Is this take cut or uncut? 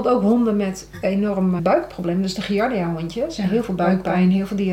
cut